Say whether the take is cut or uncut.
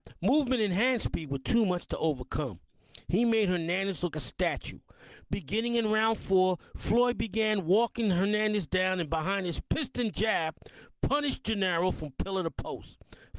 cut